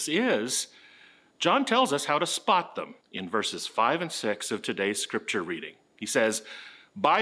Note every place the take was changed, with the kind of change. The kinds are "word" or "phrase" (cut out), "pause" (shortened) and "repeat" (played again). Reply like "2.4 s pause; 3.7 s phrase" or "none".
3.0 s pause